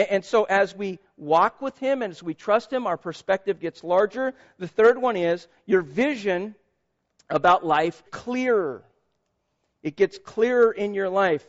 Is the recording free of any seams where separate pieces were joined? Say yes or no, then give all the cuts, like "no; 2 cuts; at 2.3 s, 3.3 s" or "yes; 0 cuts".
no; 1 cut; at 8.1 s